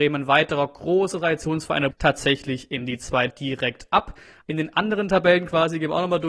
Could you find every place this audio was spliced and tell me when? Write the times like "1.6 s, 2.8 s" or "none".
1.9 s, 3.3 s